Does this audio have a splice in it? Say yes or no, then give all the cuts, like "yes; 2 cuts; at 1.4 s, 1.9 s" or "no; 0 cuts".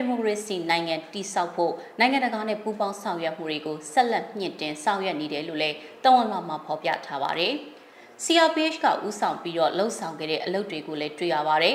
no; 0 cuts